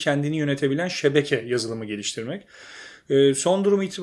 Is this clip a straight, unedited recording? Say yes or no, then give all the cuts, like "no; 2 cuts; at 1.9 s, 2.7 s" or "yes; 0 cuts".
yes; 0 cuts